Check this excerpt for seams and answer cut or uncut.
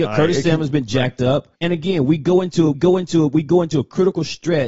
cut